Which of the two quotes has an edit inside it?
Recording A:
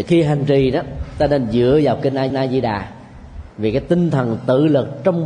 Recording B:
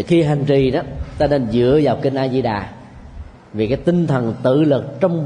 A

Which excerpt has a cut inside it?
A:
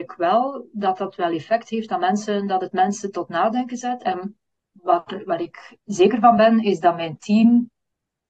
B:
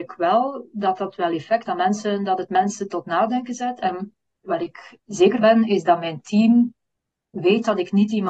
B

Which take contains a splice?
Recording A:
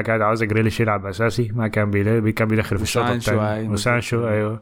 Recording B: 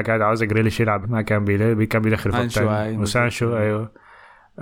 B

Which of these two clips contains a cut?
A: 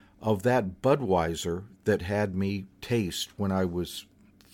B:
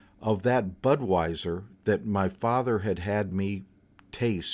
A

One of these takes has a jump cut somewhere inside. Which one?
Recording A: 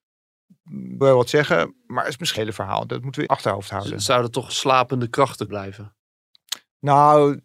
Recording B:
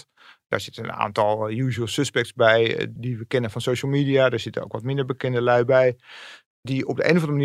A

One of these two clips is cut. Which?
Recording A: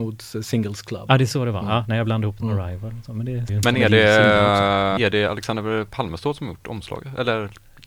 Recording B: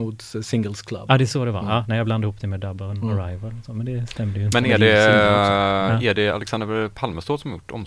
A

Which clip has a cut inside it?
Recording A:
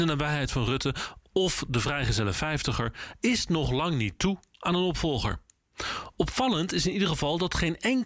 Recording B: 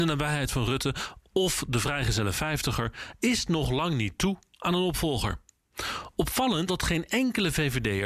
B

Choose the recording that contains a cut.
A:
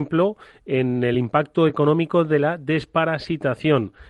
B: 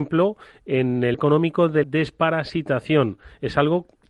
B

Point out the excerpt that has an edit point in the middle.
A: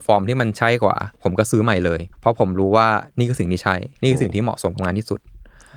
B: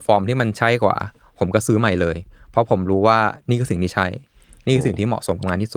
A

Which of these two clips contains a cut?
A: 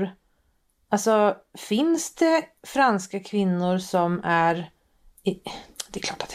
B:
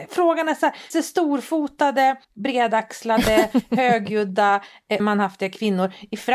B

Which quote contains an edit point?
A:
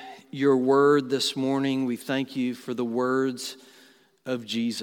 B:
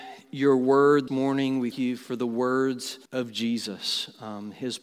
B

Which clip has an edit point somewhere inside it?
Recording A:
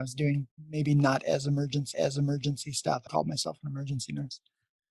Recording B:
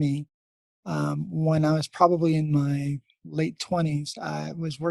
A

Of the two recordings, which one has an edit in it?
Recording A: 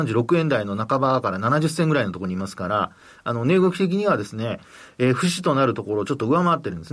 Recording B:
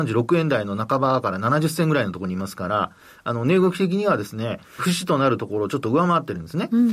B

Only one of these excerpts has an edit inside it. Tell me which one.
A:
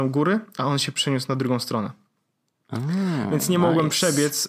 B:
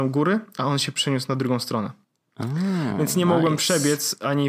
B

